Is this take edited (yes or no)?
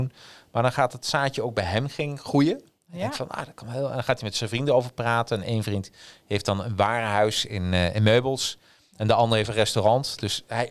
no